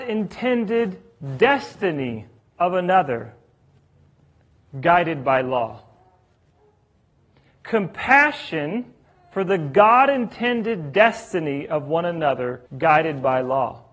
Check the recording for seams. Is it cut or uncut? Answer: cut